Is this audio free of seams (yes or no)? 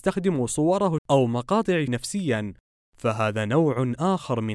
no